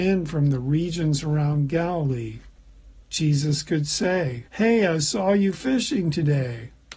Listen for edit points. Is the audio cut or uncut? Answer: cut